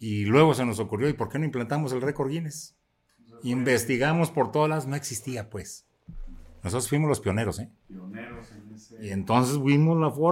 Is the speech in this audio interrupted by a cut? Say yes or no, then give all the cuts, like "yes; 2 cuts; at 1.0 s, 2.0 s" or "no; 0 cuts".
no; 0 cuts